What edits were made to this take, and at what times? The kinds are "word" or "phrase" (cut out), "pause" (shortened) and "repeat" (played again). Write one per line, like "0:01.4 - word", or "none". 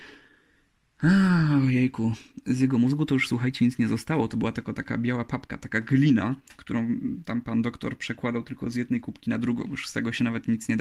none